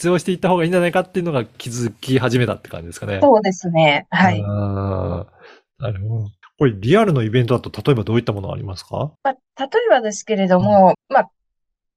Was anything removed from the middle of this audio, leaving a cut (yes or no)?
yes